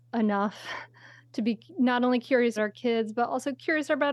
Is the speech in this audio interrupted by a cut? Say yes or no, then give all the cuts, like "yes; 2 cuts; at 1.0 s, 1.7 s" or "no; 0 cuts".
yes; 1 cut; at 2.6 s